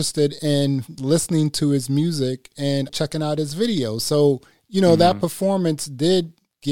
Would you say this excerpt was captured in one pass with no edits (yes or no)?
no